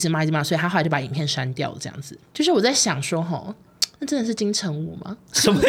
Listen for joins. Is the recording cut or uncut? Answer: cut